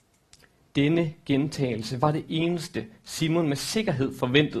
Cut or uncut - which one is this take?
uncut